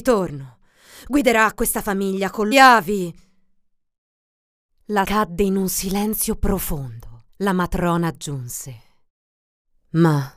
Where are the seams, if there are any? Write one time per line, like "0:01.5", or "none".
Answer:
0:02.5
0:05.0
0:07.3